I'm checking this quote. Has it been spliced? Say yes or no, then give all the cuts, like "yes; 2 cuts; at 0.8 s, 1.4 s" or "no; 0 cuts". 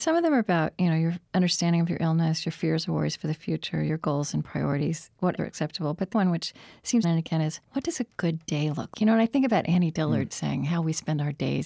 yes; 6 cuts; at 1.3 s, 5.4 s, 6.1 s, 7.0 s, 7.6 s, 8.9 s